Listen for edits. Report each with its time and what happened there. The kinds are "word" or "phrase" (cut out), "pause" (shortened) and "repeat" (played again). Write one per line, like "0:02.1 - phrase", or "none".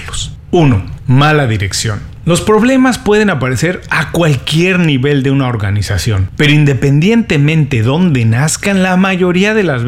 none